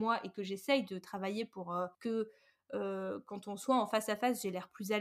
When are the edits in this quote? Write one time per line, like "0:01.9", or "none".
0:01.9